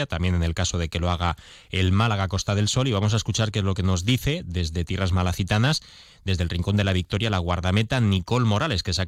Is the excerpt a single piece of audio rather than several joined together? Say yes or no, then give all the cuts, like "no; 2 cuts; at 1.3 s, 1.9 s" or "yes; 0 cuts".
yes; 0 cuts